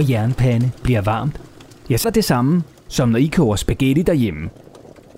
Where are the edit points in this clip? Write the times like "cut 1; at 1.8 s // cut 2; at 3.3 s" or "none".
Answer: cut 1; at 2.0 s